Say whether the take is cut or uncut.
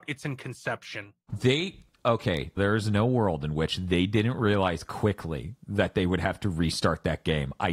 cut